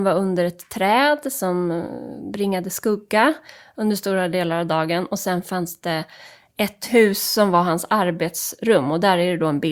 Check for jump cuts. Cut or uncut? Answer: uncut